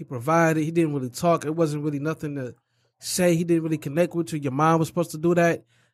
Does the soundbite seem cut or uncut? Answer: uncut